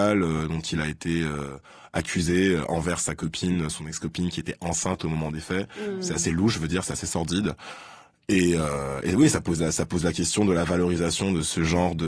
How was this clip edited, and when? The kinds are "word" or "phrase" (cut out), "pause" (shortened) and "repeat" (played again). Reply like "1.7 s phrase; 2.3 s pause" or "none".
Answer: none